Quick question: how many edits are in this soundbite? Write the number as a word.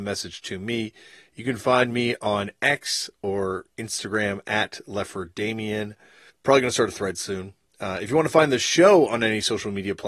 one